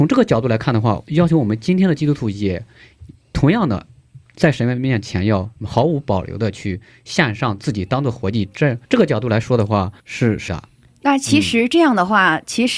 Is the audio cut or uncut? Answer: cut